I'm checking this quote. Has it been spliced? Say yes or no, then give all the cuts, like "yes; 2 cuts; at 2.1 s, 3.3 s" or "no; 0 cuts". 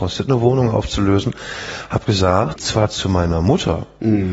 yes; 1 cut; at 2.6 s